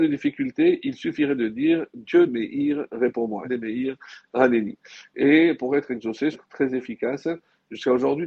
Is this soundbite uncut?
no; 3 cuts; at 2.3 s, 3.4 s, 6.3 s

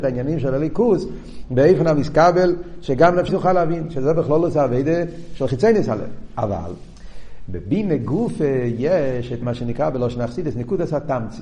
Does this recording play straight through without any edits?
no; 2 cuts; at 3.3 s, 9.4 s

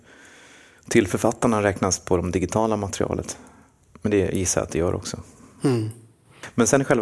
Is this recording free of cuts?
yes; 0 cuts

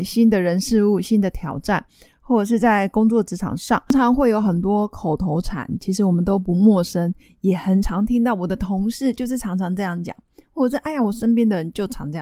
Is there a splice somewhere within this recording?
no; 0 cuts

